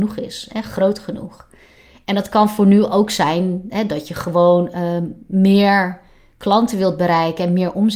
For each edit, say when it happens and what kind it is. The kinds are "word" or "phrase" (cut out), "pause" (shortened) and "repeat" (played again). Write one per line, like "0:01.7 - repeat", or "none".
none